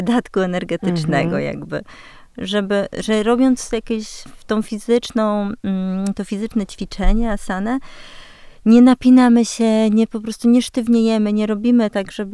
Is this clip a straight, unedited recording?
yes; 0 cuts

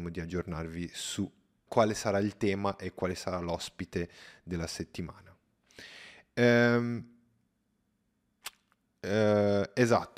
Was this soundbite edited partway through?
yes; 1 cut; at 1.7 s

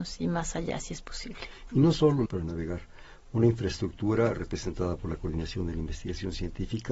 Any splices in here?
yes; 1 cut; at 2.3 s

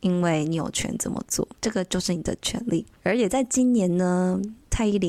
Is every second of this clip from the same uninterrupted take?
no; 1 cut; at 1.6 s

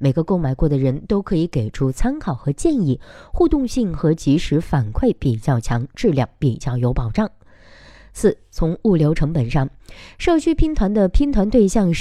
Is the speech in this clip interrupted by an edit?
no; 0 cuts

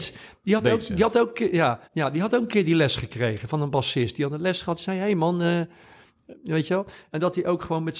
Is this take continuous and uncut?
no; 1 cut; at 1.8 s

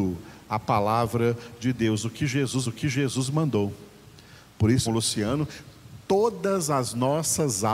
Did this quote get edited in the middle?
yes; 2 cuts; at 2.6 s, 4.9 s

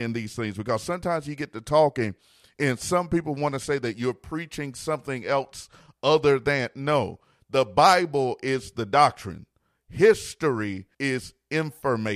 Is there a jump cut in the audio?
yes; 1 cut; at 10.9 s

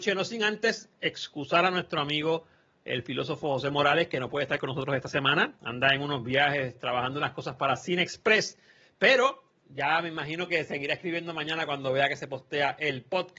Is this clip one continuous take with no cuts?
yes; 0 cuts

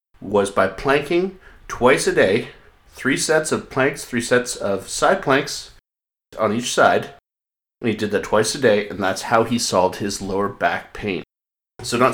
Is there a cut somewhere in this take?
no; 0 cuts

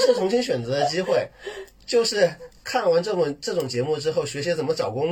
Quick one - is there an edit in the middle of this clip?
no; 0 cuts

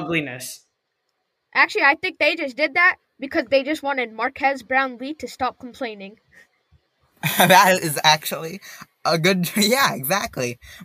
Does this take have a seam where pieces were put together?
no; 0 cuts

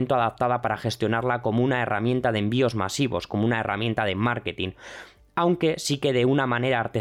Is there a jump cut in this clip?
no; 0 cuts

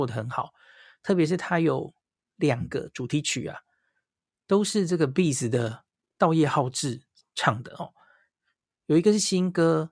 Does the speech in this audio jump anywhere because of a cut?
no; 0 cuts

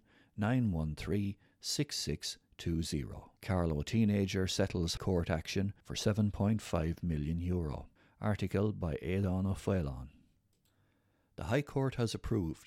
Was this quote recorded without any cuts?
no; 4 cuts; at 3.4 s, 5.0 s, 5.8 s, 8.0 s

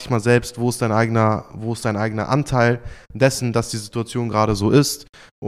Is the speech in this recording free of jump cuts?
yes; 0 cuts

